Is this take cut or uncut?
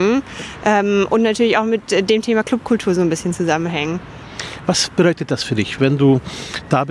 uncut